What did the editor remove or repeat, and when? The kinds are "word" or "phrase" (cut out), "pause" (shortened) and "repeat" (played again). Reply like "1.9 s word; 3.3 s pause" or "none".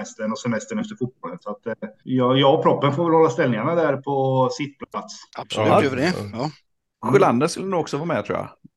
2.0 s pause; 5.3 s pause